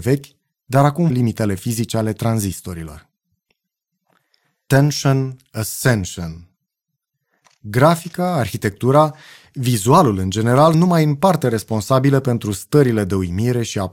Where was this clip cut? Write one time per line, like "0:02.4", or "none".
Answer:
0:01.1
0:10.7